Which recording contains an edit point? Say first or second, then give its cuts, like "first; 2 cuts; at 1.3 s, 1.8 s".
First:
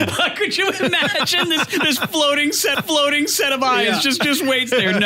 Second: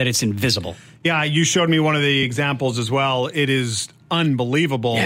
first; 1 cut; at 2.7 s